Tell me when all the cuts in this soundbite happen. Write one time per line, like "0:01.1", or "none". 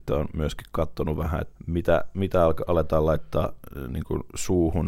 0:01.5